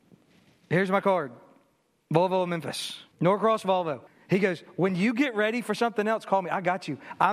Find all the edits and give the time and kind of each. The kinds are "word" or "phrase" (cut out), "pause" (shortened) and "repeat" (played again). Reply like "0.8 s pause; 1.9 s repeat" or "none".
3.1 s pause; 4.1 s pause